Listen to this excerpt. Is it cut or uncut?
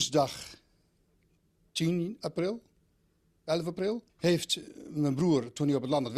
cut